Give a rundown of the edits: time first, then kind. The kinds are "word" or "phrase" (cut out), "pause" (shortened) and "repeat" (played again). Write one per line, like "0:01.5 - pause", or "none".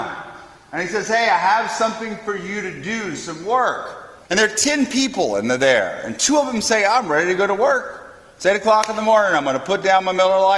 0:04.2 - pause